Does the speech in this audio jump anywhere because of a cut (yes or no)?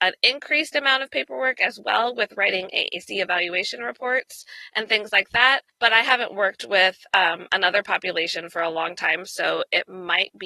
no